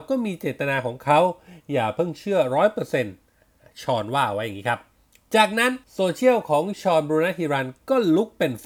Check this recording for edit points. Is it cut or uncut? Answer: cut